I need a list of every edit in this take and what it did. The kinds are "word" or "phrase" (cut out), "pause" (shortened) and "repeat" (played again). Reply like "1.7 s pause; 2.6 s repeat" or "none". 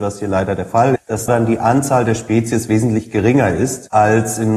1.0 s word; 1.3 s word